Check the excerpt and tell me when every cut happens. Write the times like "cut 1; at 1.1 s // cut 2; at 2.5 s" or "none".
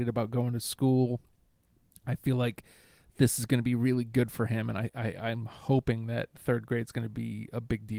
none